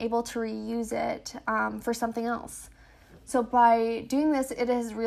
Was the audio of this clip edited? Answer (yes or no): no